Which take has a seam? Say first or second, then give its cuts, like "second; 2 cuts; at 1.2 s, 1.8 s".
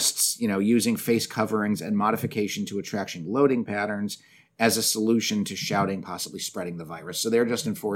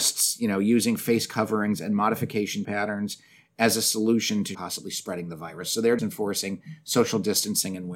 second; 3 cuts; at 2.6 s, 4.5 s, 6.0 s